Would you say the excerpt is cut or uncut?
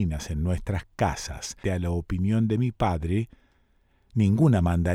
cut